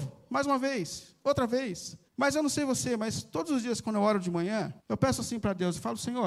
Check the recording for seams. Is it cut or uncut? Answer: cut